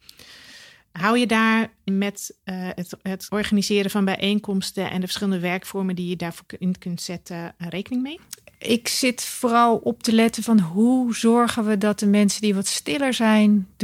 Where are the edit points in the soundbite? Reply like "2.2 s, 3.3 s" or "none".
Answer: none